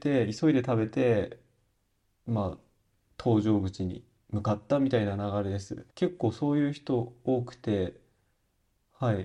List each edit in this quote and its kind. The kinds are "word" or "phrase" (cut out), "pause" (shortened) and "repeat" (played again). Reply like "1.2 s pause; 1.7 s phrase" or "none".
5.9 s pause